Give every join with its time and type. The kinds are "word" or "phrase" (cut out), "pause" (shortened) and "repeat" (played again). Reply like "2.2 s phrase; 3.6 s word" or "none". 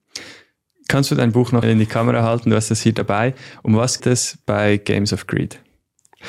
1.6 s word; 4.0 s word